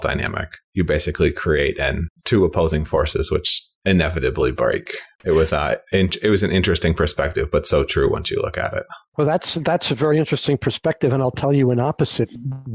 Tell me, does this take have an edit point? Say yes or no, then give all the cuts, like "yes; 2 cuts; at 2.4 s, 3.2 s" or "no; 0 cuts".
no; 0 cuts